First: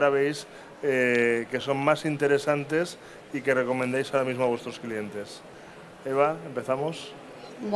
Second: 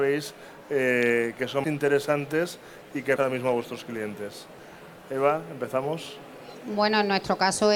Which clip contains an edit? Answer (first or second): second